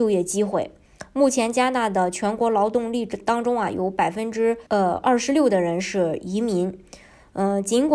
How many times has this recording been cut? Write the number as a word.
one